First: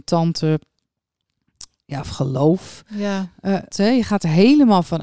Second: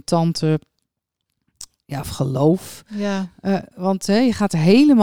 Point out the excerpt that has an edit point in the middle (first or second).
first